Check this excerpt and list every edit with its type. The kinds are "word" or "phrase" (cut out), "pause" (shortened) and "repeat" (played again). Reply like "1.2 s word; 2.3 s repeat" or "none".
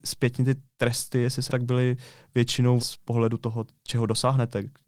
1.5 s word; 2.8 s word